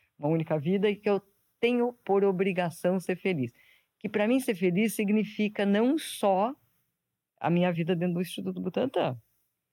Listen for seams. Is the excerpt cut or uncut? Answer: uncut